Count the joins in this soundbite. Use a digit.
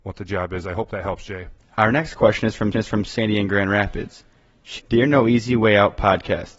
3